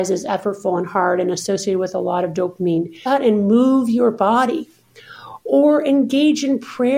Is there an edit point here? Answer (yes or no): yes